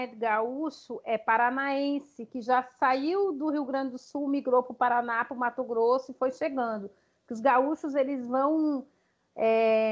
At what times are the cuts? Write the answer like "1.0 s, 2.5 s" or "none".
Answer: none